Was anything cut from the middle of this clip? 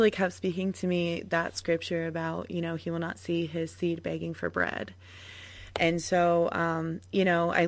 no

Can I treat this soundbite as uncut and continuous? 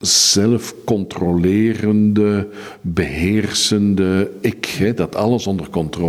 yes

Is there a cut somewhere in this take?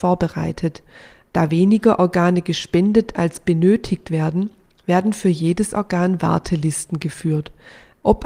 no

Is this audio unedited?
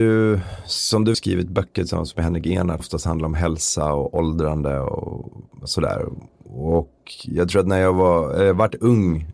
no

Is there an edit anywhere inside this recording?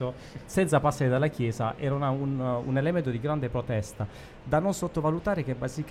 no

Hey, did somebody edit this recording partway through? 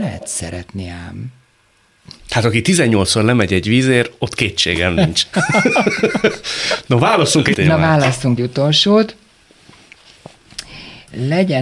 yes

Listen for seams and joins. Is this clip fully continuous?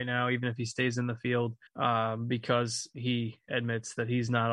no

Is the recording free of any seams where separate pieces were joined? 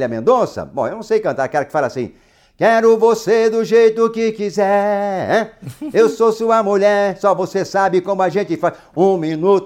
yes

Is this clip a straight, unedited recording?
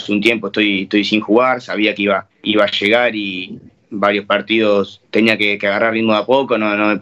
no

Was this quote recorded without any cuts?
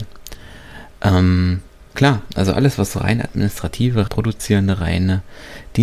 no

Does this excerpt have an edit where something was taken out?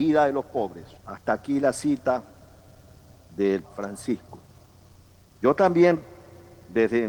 yes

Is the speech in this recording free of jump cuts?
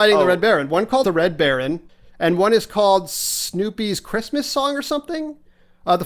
no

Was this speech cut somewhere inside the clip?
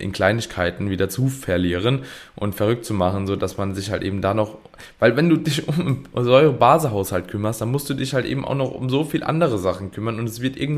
no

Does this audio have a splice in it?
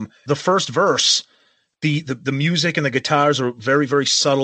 no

